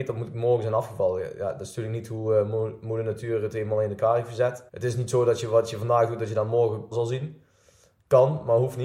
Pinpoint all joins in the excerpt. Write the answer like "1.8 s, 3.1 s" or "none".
4.7 s, 6.9 s